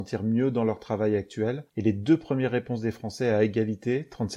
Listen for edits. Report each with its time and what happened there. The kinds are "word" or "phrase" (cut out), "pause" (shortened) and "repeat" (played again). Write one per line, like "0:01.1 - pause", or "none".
0:01.7 - pause